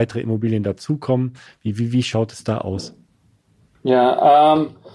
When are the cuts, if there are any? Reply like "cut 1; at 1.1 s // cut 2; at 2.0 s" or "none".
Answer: none